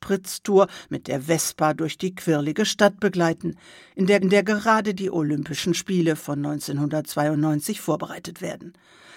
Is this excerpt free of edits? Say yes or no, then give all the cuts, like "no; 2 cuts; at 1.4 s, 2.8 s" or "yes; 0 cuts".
no; 1 cut; at 4.2 s